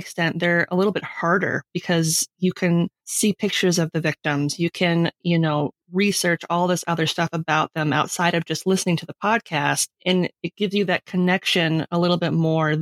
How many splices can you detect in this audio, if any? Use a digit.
0